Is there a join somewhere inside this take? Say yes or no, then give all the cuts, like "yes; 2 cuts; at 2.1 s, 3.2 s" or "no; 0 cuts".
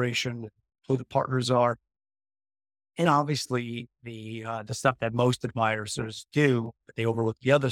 yes; 1 cut; at 3.1 s